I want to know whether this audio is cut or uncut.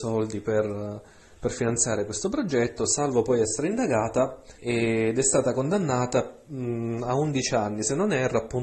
cut